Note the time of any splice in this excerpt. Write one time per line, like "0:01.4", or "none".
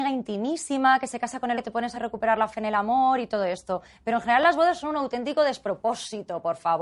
0:01.5
0:01.9